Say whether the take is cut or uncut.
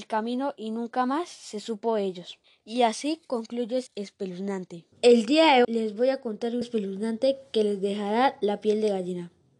cut